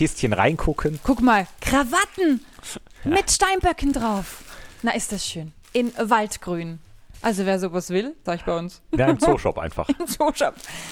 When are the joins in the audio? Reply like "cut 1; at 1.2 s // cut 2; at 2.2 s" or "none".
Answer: cut 1; at 5.6 s // cut 2; at 8.3 s